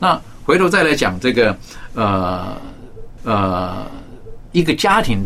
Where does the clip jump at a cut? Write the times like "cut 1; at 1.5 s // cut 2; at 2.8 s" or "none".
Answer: cut 1; at 3.2 s